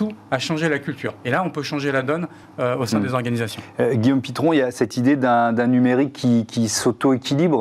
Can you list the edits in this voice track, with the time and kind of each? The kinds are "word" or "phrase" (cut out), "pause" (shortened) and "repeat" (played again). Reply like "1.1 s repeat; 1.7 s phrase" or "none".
none